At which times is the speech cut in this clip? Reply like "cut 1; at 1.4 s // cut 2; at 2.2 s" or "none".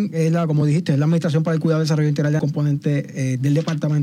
cut 1; at 2.4 s